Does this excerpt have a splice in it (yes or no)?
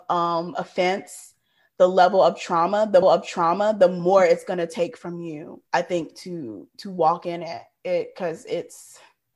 yes